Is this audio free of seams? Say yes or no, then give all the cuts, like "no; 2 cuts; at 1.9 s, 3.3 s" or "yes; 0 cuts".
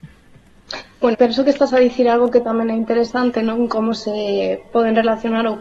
no; 1 cut; at 1.1 s